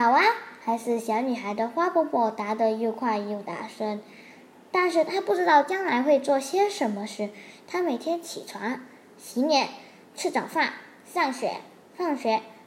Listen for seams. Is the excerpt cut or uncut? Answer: uncut